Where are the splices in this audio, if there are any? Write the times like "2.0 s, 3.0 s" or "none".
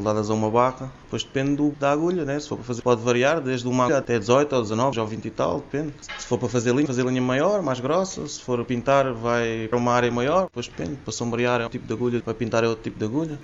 1.7 s, 2.8 s, 3.9 s, 4.9 s, 6.9 s, 8.7 s, 9.7 s, 11.7 s, 12.2 s

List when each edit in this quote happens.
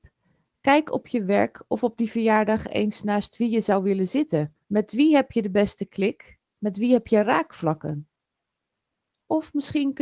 4.6 s, 6.5 s

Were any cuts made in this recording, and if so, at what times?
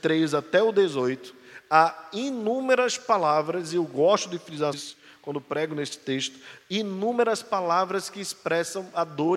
4.7 s

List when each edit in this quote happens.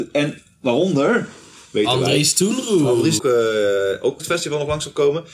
3.2 s, 4.2 s

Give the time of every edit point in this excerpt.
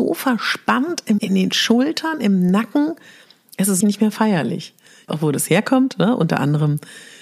1.2 s, 3.8 s, 5.1 s

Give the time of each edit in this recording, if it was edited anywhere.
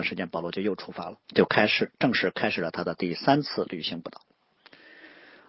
1.2 s

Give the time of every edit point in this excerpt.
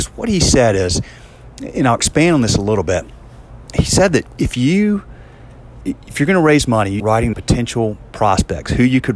5.8 s, 7.0 s, 7.3 s

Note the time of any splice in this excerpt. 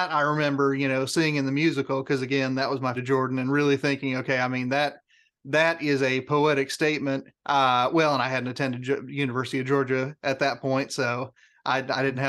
2.9 s, 7.3 s

